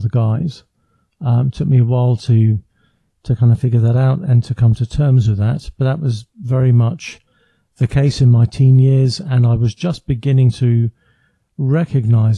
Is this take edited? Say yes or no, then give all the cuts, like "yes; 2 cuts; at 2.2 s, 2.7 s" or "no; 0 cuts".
no; 0 cuts